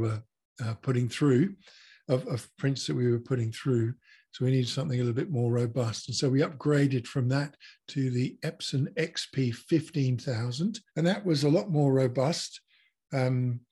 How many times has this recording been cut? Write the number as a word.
one